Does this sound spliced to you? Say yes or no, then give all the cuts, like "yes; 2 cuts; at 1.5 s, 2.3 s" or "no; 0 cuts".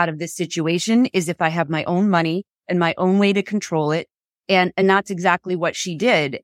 no; 0 cuts